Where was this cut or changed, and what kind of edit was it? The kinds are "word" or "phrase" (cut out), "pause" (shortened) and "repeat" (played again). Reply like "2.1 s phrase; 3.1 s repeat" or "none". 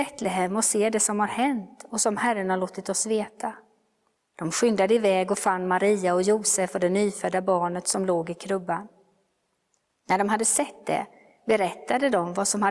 none